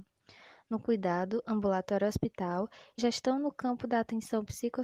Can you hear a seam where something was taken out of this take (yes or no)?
yes